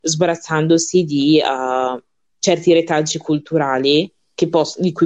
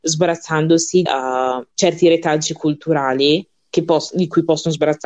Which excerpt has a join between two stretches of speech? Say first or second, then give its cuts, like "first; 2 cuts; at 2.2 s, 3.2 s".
second; 2 cuts; at 1.1 s, 1.7 s